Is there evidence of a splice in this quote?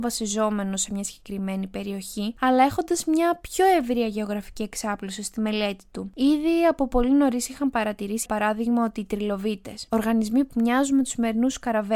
yes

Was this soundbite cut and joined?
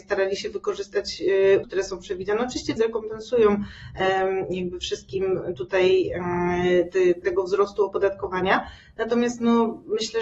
yes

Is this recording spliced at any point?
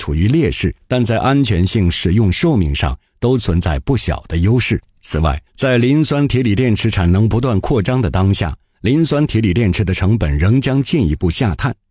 yes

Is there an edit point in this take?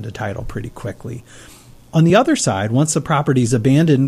no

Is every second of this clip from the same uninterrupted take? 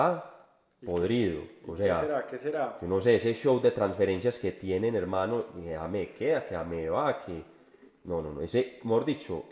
yes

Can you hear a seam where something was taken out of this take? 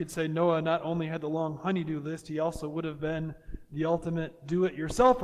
no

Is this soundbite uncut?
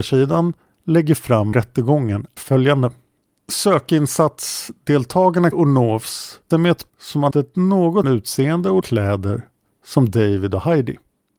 no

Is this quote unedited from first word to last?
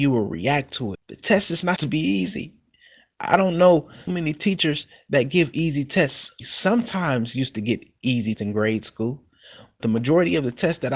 no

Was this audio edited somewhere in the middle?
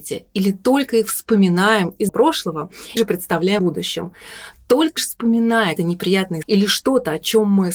yes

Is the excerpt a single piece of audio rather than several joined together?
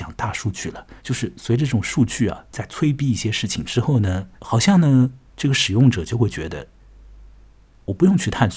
no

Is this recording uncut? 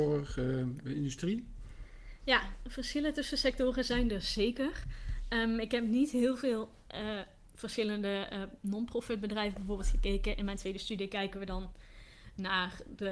yes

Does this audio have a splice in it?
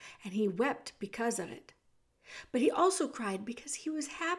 no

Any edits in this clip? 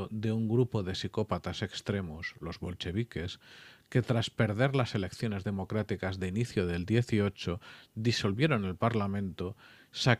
no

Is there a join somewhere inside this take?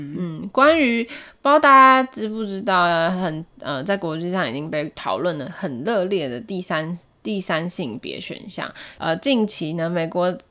no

